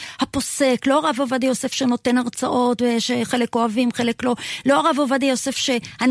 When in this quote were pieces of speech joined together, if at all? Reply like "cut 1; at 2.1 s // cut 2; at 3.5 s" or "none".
none